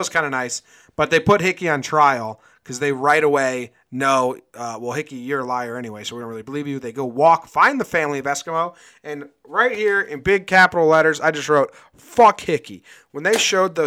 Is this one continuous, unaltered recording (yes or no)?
yes